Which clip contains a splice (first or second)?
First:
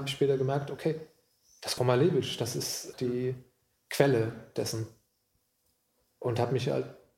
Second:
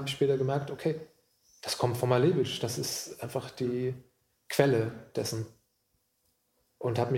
first